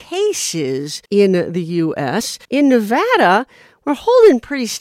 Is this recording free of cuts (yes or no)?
no